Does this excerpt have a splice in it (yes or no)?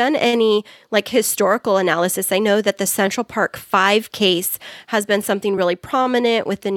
no